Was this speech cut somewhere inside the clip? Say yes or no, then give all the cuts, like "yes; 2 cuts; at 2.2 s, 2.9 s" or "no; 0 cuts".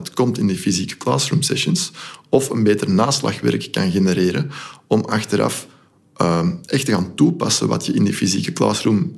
no; 0 cuts